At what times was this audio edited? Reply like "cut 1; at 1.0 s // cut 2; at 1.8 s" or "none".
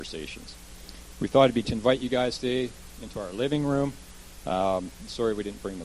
cut 1; at 1.6 s